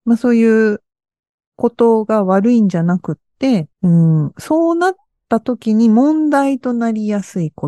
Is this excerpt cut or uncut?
cut